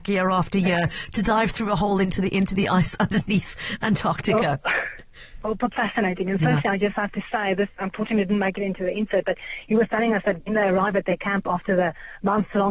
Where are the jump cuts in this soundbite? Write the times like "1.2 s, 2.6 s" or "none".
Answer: 5.7 s